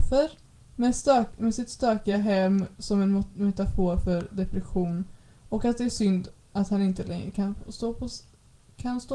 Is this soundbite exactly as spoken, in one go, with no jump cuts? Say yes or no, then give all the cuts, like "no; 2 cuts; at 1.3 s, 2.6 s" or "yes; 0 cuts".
yes; 0 cuts